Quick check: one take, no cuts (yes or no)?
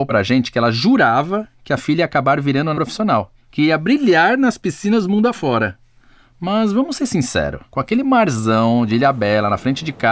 no